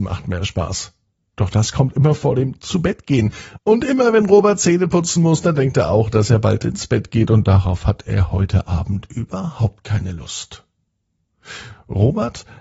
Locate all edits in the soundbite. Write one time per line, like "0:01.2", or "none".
none